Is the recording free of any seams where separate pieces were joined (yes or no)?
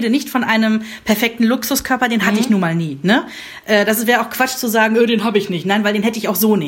yes